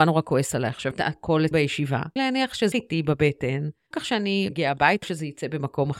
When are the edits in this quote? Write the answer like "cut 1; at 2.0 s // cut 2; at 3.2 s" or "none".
cut 1; at 0.9 s // cut 2; at 1.5 s // cut 3; at 2.2 s // cut 4; at 2.7 s // cut 5; at 3.9 s // cut 6; at 4.5 s // cut 7; at 5.0 s